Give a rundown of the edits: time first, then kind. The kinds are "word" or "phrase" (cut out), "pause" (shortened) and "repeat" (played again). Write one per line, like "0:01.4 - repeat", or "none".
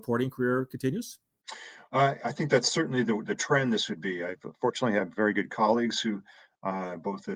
none